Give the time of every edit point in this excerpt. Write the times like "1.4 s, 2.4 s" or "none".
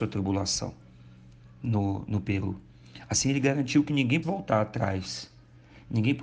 4.2 s